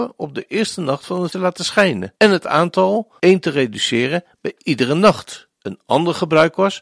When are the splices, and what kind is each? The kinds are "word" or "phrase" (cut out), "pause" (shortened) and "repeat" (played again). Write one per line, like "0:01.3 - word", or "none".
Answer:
0:01.3 - word
0:02.2 - pause
0:03.2 - word
0:05.5 - pause

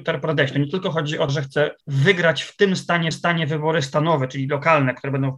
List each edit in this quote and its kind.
0:01.3 - word
0:01.8 - pause
0:03.1 - repeat

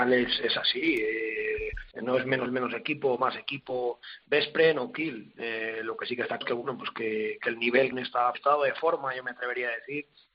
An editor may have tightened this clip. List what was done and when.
0:01.9 - pause
0:02.5 - phrase
0:06.4 - word
0:07.9 - phrase
0:08.3 - phrase

